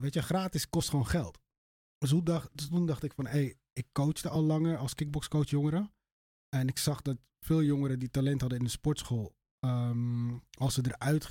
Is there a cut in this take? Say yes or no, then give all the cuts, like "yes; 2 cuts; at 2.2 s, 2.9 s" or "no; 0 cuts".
no; 0 cuts